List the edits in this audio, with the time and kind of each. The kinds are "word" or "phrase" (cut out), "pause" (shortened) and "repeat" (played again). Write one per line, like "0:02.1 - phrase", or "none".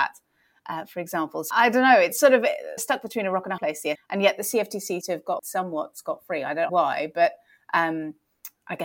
0:01.5 - word
0:02.1 - word
0:02.8 - word
0:03.6 - word
0:03.9 - word
0:05.0 - word
0:05.4 - word
0:06.7 - word